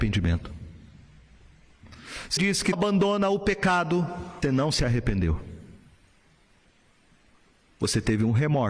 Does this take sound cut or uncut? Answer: cut